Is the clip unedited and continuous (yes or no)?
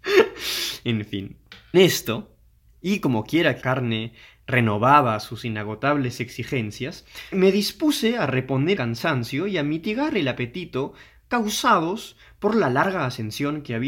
no